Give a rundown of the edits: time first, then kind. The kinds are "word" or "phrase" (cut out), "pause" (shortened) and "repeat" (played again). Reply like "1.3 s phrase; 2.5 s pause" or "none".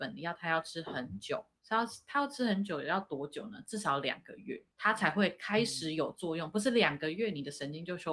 1.5 s pause; 4.7 s pause